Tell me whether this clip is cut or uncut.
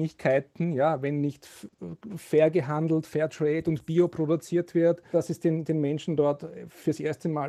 cut